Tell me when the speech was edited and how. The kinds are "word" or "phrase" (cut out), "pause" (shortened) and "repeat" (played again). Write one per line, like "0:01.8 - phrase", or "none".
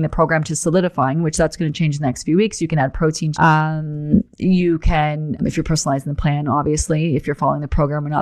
0:03.3 - phrase
0:05.4 - word